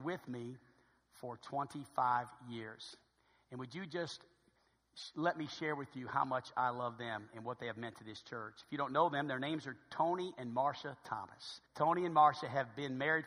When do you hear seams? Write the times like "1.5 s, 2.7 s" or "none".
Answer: 11.7 s